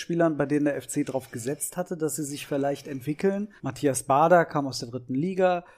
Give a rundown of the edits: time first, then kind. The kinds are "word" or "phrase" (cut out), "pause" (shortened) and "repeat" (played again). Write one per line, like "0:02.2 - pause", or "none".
0:03.6 - pause